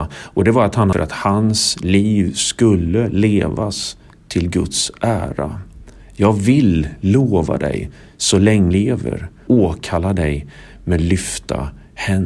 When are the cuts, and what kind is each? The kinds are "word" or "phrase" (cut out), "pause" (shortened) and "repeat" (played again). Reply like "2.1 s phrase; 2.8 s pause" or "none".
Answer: 0.9 s phrase; 8.7 s word; 9.5 s word